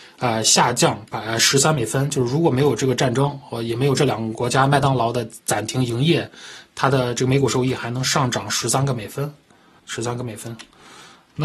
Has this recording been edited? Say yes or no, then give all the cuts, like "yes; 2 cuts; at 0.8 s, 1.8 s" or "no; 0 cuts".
yes; 1 cut; at 9.8 s